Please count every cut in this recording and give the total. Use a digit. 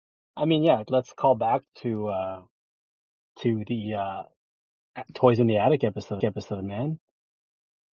2